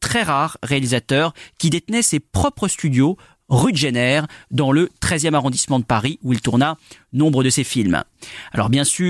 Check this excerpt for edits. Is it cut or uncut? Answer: uncut